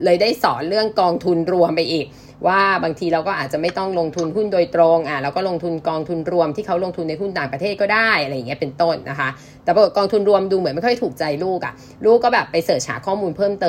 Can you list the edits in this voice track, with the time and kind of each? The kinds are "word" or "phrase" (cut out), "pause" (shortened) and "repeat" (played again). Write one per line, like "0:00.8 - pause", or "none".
none